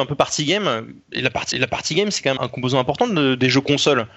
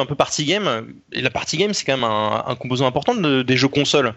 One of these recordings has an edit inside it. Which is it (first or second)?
first